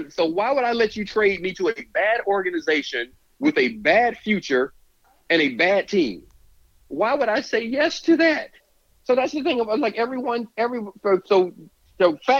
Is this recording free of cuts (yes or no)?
yes